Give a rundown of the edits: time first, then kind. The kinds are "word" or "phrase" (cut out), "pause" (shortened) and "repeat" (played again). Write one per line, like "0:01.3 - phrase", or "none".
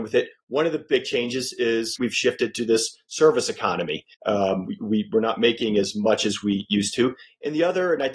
0:02.0 - word
0:04.1 - pause

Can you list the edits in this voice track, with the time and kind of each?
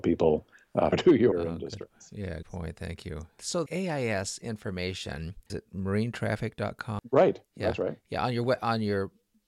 0:00.9 - word
0:01.3 - phrase
0:02.4 - word
0:03.7 - word
0:05.5 - word

